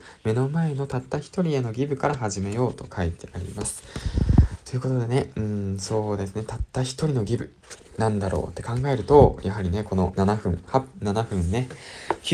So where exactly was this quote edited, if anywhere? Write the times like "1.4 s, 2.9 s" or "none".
none